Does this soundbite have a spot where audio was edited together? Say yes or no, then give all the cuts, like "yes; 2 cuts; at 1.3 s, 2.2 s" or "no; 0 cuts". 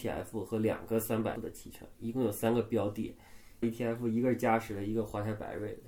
yes; 2 cuts; at 1.3 s, 3.6 s